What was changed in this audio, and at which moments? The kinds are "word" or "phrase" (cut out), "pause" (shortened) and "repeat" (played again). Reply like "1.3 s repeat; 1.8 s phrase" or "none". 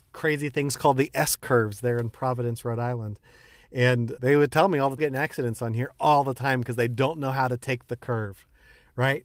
4.2 s word; 5.0 s phrase